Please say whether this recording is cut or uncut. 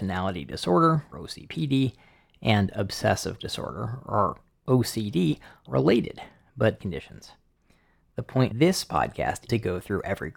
cut